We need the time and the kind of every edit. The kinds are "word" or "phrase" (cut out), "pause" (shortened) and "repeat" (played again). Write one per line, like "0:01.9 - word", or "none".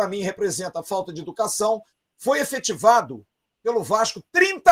none